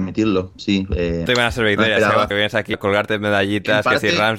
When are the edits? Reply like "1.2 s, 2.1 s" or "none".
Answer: 1.3 s, 2.3 s, 2.7 s